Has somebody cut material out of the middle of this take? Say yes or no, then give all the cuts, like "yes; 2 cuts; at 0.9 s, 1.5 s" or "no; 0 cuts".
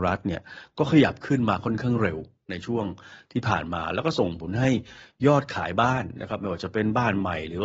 no; 0 cuts